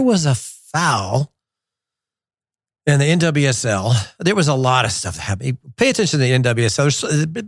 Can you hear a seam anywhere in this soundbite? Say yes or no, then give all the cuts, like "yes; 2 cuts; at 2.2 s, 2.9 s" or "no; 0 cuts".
no; 0 cuts